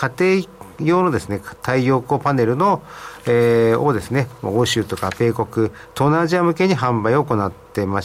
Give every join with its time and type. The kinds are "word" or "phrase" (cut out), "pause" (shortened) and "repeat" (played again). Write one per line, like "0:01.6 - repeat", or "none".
none